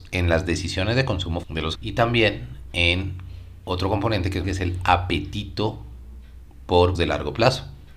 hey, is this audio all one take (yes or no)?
no